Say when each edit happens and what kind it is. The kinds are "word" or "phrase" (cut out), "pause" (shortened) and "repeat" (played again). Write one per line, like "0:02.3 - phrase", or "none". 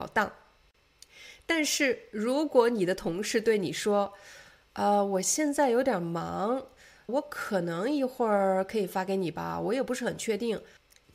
0:07.1 - word